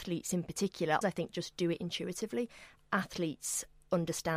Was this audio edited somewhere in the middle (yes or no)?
yes